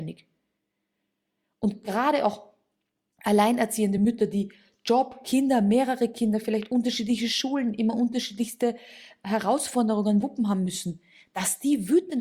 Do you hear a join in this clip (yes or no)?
no